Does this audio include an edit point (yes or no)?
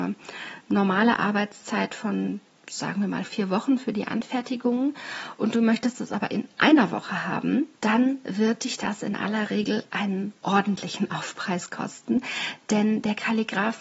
yes